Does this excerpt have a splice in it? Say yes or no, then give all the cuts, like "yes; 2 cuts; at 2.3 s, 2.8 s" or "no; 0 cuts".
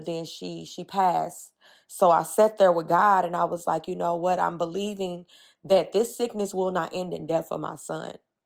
no; 0 cuts